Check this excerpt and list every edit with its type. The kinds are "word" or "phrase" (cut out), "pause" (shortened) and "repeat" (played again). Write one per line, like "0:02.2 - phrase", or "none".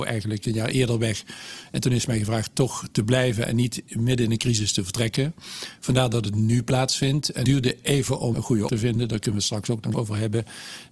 0:07.4 - word
0:08.3 - word
0:08.7 - word
0:09.9 - word